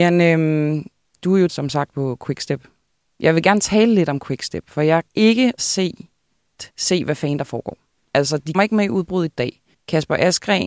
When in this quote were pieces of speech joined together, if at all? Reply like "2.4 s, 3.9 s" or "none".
1.5 s, 1.9 s, 5.1 s, 5.6 s, 6.7 s, 8.5 s, 9.7 s